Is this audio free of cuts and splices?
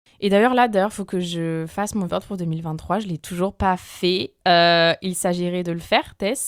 no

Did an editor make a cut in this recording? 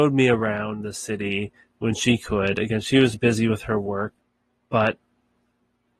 yes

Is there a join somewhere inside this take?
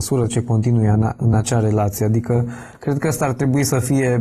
no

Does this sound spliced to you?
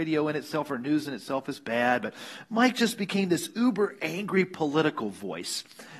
no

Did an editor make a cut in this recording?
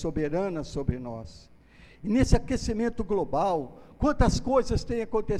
no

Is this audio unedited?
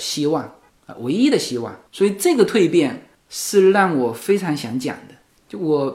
no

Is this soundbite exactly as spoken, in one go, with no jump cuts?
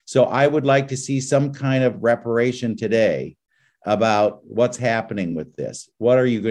yes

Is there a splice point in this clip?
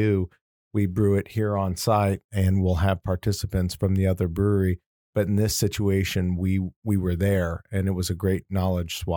no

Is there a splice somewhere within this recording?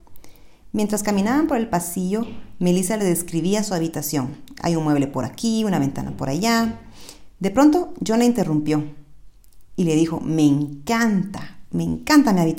no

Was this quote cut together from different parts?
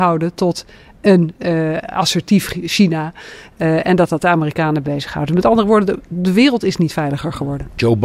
no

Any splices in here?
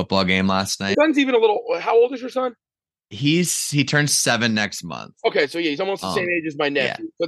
yes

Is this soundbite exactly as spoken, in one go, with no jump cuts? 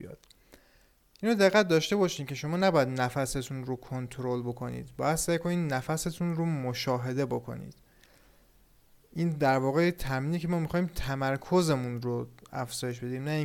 yes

